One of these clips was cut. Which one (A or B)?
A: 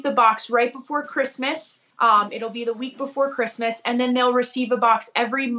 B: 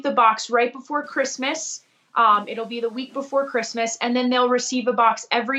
A